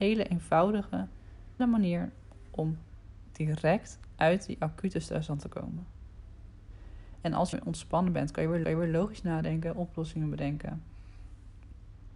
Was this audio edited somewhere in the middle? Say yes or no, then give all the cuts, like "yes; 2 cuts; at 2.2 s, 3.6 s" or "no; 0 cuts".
yes; 3 cuts; at 1.6 s, 7.5 s, 8.6 s